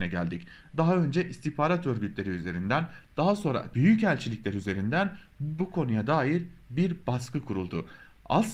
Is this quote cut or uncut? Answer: cut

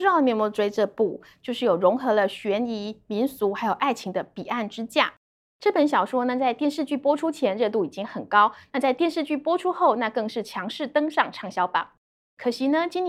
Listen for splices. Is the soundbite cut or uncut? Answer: uncut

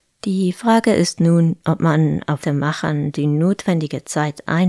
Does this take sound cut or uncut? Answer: cut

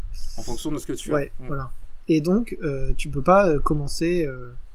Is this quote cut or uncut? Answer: uncut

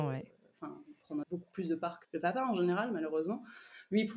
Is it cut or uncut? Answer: cut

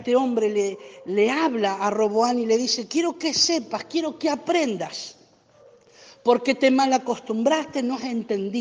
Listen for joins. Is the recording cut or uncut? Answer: uncut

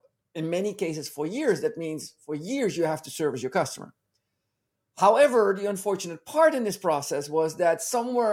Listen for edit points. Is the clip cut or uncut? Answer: uncut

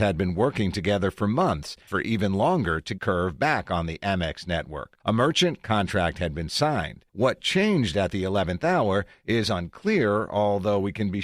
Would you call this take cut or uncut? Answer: cut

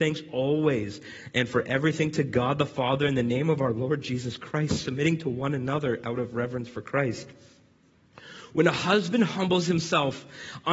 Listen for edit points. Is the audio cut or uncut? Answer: uncut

